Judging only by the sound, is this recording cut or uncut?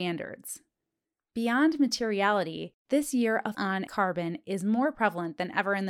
cut